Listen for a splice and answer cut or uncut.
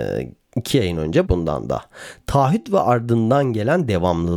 cut